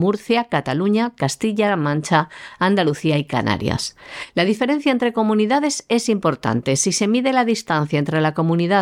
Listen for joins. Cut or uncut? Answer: uncut